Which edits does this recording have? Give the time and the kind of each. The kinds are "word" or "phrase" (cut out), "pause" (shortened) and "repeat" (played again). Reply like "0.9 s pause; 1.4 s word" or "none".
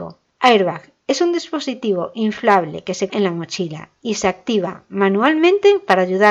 3.1 s word